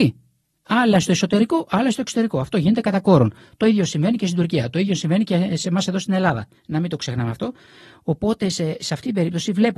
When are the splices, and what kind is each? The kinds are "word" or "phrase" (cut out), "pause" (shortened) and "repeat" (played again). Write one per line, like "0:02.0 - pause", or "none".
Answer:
0:06.6 - pause